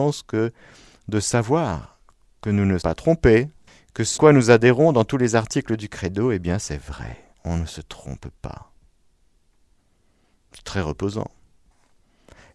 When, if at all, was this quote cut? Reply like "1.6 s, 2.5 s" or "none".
2.8 s, 3.7 s, 4.2 s, 7.3 s